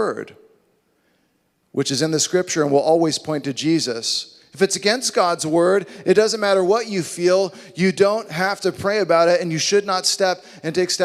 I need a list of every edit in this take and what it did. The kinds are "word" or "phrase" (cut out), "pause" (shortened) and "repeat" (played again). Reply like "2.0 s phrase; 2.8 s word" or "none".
none